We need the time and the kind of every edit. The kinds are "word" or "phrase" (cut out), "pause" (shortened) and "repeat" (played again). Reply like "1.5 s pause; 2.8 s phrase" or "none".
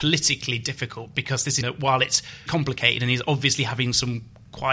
1.6 s word; 2.5 s word